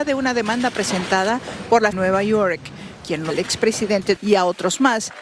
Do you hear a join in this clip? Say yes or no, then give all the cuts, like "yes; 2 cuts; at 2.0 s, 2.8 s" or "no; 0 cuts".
yes; 3 cuts; at 1.9 s, 3.3 s, 4.2 s